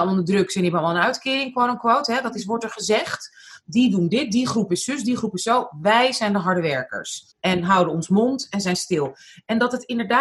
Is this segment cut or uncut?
cut